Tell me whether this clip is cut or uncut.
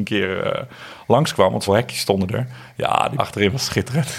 cut